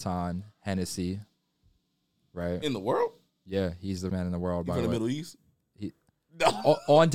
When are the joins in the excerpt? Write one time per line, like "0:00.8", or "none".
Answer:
0:04.1